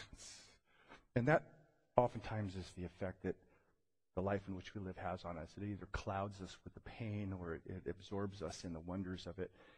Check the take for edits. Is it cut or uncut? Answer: uncut